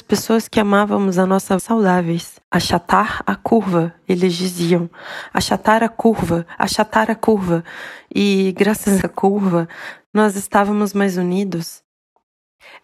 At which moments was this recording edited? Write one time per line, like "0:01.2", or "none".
0:01.6
0:02.4
0:09.0

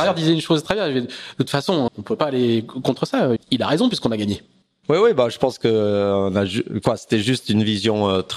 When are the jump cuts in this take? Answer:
0:01.9
0:03.4
0:04.6

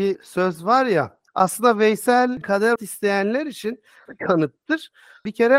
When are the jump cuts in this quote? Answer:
0:01.3
0:02.4
0:02.8
0:04.1

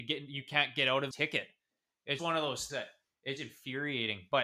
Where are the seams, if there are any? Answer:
0:01.1
0:02.2
0:02.7
0:03.4

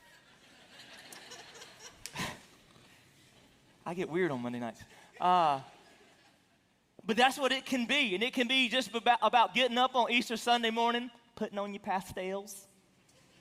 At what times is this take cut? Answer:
none

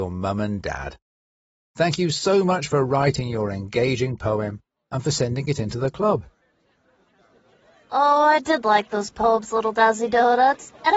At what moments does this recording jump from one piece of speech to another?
none

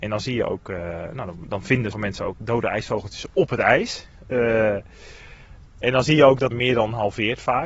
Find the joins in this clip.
0:01.9
0:02.3
0:06.5

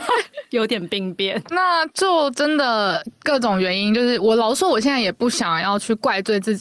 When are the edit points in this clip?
0:01.5

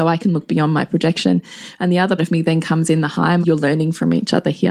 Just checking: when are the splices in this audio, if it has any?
0:02.2
0:03.4

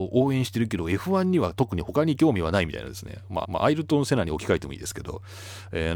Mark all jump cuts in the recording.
0:03.4

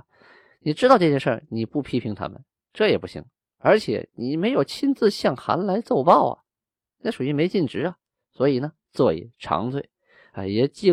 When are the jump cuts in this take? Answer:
none

